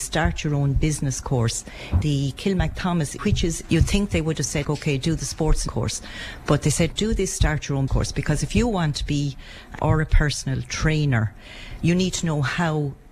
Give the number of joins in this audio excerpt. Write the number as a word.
eight